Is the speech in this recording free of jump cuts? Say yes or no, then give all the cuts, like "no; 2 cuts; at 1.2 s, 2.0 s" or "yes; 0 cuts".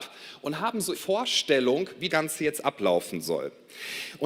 no; 2 cuts; at 0.9 s, 2.1 s